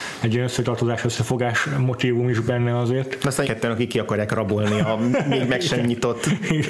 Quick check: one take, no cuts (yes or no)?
no